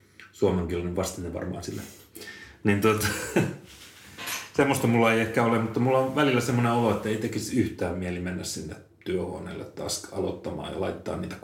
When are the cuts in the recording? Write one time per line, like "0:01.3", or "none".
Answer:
none